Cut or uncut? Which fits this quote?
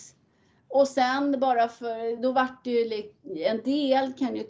uncut